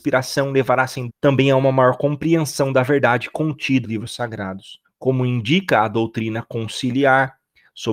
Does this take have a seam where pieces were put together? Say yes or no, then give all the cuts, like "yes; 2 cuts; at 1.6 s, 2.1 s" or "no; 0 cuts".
yes; 3 cuts; at 1.1 s, 3.8 s, 4.8 s